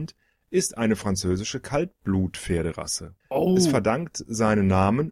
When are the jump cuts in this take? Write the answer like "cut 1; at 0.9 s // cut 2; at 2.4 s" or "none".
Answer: cut 1; at 3.2 s